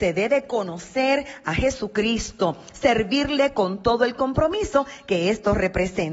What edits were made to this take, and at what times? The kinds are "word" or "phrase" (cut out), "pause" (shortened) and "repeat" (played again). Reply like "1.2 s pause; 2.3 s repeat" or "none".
none